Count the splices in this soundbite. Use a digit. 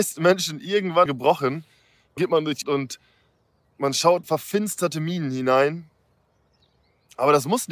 5